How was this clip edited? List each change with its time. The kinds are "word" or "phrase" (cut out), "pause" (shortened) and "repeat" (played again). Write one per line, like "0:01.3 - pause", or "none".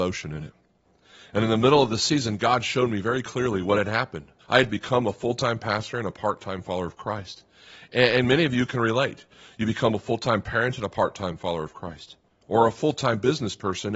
0:04.4 - pause